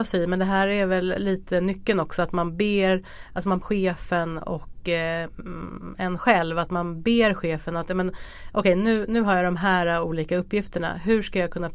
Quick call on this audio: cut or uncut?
cut